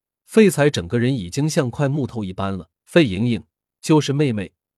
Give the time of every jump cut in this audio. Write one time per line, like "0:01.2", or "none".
0:02.8